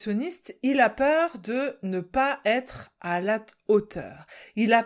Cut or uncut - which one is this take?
uncut